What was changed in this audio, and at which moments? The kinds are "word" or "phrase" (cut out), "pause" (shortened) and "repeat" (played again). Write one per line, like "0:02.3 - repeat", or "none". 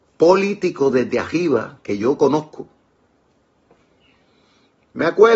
none